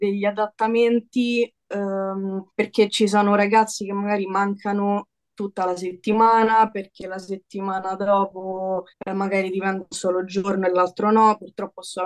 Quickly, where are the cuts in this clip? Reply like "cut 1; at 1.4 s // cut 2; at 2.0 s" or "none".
cut 1; at 2.5 s // cut 2; at 8.9 s